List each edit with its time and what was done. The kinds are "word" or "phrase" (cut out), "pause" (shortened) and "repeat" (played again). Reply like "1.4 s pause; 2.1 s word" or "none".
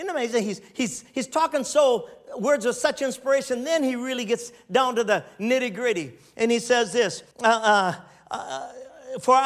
7.3 s pause